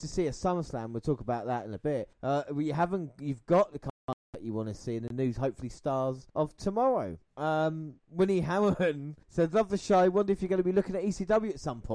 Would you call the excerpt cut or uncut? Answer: cut